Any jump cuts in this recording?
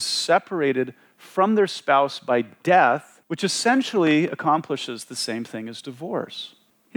yes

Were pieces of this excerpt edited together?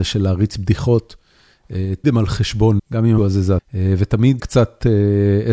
yes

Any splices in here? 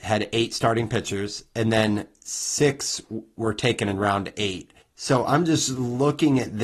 yes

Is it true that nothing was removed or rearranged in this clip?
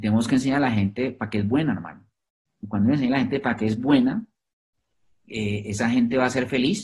yes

